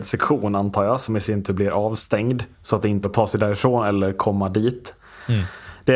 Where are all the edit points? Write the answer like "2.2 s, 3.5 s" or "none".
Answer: 2.5 s, 3.0 s